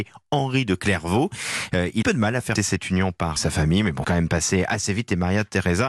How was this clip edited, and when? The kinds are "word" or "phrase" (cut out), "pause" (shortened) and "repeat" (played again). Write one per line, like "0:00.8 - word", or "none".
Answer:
0:02.0 - phrase
0:02.5 - word
0:03.4 - word
0:04.0 - word

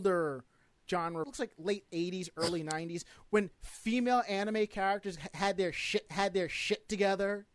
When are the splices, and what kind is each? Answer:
0:01.2 - phrase
0:03.5 - pause
0:06.1 - repeat

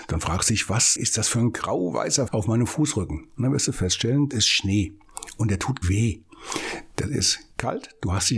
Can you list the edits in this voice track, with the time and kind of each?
0:01.0 - phrase
0:02.3 - word
0:04.3 - word
0:05.8 - phrase

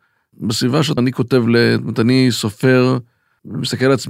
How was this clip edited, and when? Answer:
0:01.0 - word

